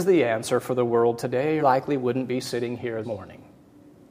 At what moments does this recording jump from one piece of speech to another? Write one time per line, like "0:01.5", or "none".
0:01.6
0:03.0